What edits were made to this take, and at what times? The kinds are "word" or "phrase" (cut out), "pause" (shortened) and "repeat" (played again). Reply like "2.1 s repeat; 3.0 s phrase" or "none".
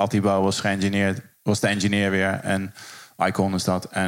none